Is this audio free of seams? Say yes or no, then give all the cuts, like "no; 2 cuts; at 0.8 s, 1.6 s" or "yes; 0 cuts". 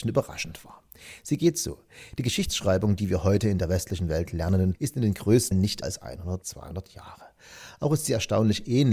no; 4 cuts; at 4.7 s, 5.5 s, 5.8 s, 6.4 s